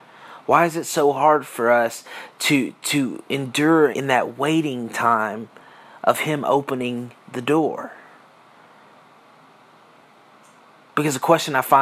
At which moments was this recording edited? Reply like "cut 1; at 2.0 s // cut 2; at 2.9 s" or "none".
cut 1; at 3.9 s